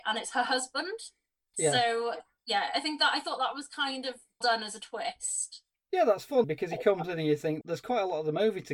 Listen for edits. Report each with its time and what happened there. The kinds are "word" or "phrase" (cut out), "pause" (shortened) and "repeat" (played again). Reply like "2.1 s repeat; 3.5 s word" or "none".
4.4 s word; 6.4 s word; 7.6 s word